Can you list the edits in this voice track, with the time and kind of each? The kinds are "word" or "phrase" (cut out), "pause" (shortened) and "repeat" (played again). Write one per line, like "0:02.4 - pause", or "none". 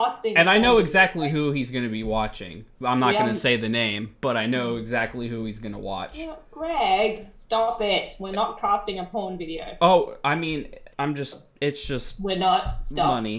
0:10.9 - word